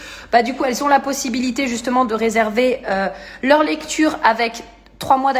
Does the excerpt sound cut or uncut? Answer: uncut